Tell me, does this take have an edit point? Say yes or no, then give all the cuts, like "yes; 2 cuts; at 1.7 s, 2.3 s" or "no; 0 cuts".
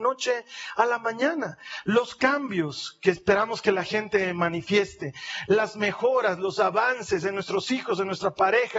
no; 0 cuts